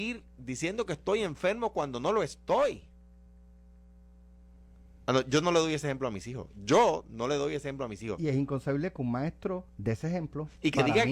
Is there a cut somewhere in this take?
yes; 1 cut; at 9.7 s

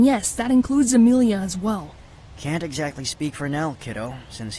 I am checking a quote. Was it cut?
no; 0 cuts

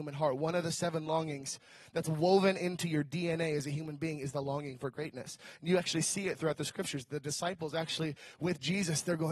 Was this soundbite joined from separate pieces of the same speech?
no; 0 cuts

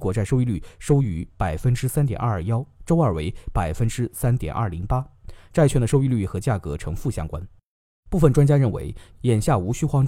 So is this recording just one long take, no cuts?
yes; 0 cuts

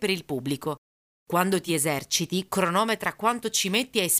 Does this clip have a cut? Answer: no; 0 cuts

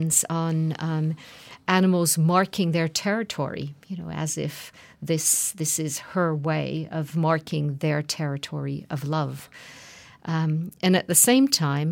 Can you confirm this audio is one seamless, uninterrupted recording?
yes; 0 cuts

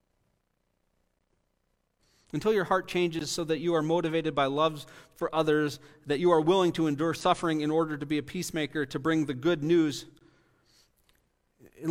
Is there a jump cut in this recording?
no; 0 cuts

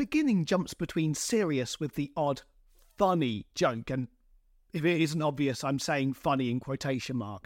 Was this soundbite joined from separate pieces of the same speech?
no; 0 cuts

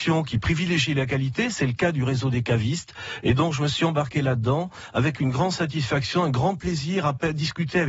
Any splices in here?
no; 0 cuts

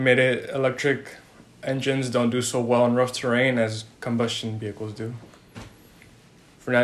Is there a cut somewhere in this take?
no; 0 cuts

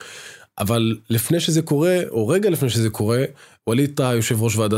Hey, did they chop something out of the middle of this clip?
no; 0 cuts

